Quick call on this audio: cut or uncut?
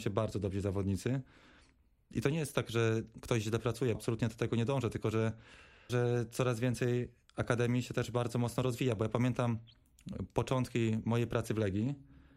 cut